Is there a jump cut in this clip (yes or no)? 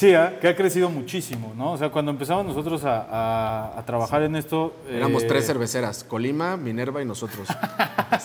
no